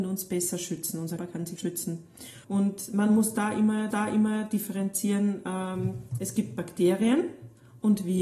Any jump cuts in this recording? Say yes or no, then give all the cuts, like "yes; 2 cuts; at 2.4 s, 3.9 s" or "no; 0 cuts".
yes; 4 cuts; at 1.2 s, 1.6 s, 2.4 s, 3.9 s